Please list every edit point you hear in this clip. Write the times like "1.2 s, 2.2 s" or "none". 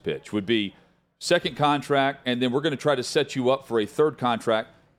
none